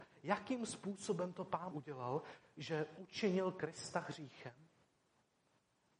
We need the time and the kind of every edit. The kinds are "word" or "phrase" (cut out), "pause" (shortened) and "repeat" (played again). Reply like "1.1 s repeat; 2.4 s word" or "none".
1.7 s word